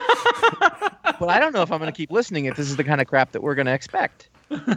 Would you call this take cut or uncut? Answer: uncut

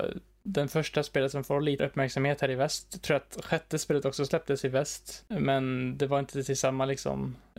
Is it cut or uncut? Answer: cut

